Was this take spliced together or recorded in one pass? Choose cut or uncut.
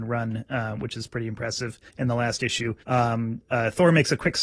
cut